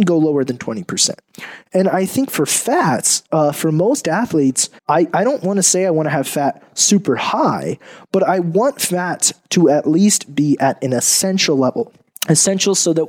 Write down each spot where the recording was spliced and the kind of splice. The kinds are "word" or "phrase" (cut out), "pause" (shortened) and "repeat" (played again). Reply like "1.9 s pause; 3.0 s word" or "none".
4.8 s pause; 12.1 s pause